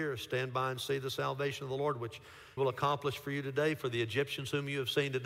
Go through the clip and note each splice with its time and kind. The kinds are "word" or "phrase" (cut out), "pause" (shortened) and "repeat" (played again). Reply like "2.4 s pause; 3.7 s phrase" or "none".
2.6 s word